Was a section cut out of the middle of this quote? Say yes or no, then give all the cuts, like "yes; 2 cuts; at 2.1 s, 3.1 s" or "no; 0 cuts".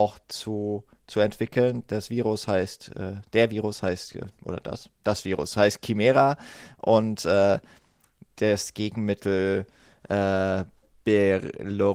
no; 0 cuts